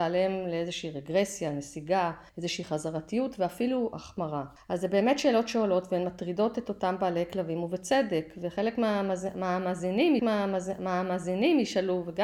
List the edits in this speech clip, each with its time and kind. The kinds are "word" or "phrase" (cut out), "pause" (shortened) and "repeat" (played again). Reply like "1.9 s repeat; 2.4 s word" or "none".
2.3 s pause; 4.6 s pause; 10.2 s repeat